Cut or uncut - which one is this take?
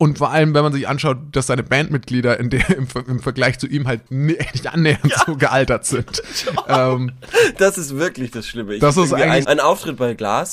cut